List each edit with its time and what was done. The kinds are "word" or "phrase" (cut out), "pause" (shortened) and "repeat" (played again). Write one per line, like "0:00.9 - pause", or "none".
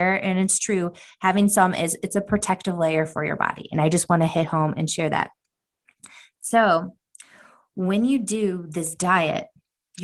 none